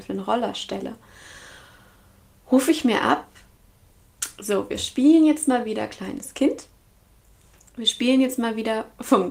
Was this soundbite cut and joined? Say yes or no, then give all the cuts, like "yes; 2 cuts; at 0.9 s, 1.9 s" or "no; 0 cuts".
no; 0 cuts